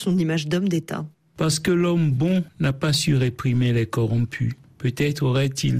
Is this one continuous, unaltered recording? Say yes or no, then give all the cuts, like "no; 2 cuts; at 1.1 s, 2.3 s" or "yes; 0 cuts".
no; 1 cut; at 1.1 s